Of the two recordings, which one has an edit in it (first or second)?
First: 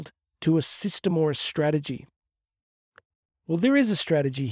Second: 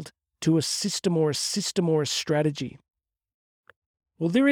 second